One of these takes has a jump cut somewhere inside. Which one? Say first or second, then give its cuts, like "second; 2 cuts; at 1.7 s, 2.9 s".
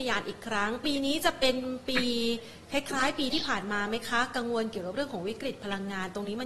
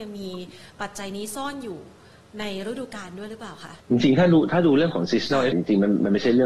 second; 2 cuts; at 3.8 s, 5.5 s